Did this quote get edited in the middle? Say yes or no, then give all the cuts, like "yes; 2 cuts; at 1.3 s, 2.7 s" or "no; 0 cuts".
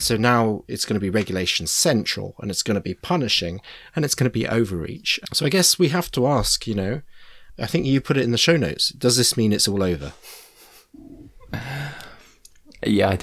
no; 0 cuts